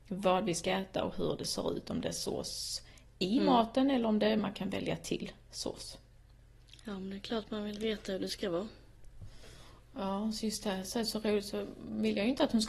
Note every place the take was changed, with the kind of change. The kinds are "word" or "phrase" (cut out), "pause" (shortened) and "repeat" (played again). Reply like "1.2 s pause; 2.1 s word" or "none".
none